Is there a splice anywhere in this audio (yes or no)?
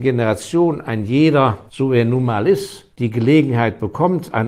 yes